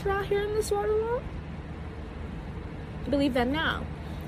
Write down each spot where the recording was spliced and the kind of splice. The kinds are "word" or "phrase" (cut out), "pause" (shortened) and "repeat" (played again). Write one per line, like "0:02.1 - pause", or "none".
0:03.1 - word